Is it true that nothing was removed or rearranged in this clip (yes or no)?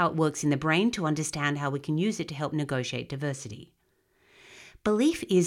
yes